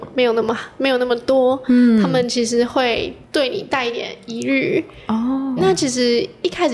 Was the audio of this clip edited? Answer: yes; 2 cuts; at 3.2 s, 5.6 s

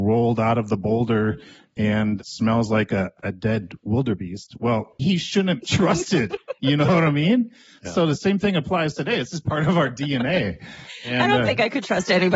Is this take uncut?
no; 2 cuts; at 5.0 s, 5.6 s

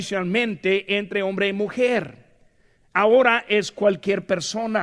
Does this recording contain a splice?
no; 0 cuts

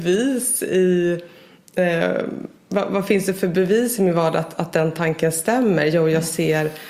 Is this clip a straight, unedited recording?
yes; 0 cuts

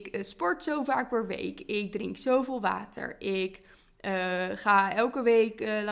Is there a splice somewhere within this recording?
no; 0 cuts

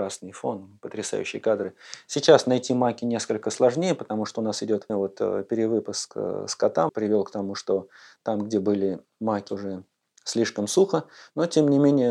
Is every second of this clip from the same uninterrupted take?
no; 3 cuts; at 4.9 s, 6.9 s, 9.5 s

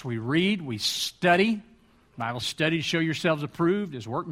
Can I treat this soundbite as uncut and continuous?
no; 1 cut; at 2.4 s

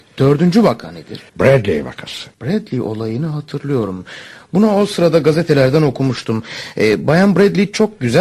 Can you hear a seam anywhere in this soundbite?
yes; 2 cuts; at 1.3 s, 2.3 s

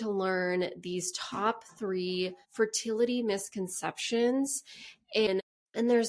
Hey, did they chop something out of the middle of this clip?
yes; 1 cut; at 2.4 s

